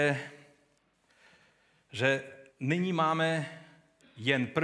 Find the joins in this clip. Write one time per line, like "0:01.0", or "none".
0:02.5